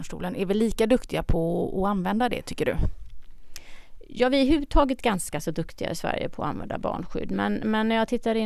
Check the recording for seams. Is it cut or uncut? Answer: uncut